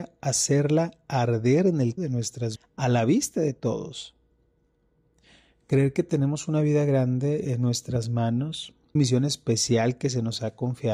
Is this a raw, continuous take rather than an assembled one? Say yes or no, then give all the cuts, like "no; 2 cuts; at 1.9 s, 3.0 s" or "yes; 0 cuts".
no; 3 cuts; at 2.0 s, 2.6 s, 9.0 s